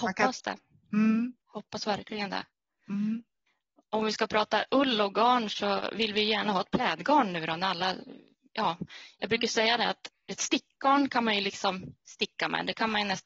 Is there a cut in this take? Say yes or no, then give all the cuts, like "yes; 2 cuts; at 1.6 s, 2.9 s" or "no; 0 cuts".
yes; 2 cuts; at 1.4 s, 12.0 s